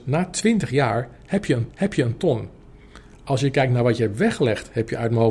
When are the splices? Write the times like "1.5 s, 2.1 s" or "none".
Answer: 1.7 s